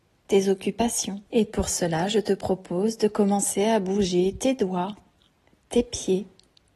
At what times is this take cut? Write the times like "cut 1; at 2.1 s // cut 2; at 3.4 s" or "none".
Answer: cut 1; at 1.3 s